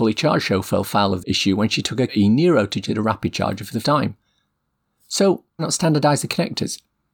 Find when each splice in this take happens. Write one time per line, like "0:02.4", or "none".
0:01.2
0:02.1
0:02.8
0:03.8
0:05.6